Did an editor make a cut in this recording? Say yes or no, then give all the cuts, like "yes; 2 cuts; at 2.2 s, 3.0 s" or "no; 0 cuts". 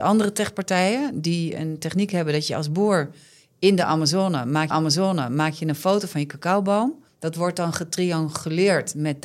yes; 2 cuts; at 4.7 s, 7.1 s